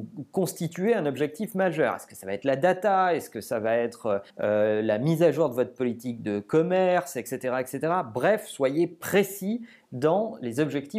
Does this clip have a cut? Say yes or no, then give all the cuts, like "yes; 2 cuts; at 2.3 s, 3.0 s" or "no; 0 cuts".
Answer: yes; 1 cut; at 4.3 s